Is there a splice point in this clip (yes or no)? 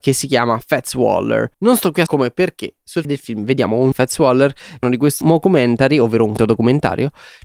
yes